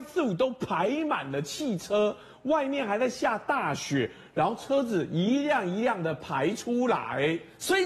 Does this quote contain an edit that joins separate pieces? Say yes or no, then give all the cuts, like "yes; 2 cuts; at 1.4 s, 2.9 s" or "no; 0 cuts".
no; 0 cuts